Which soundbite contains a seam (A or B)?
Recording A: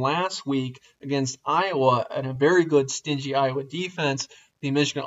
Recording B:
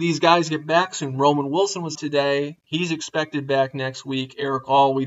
B